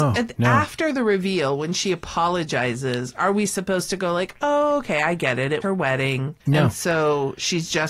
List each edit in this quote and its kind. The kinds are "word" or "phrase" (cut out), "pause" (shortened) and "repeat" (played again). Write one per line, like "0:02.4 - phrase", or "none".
0:05.6 - word
0:06.4 - pause